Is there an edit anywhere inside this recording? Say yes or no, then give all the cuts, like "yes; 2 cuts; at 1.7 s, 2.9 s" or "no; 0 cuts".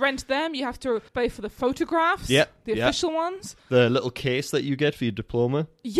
yes; 2 cuts; at 1.1 s, 3.6 s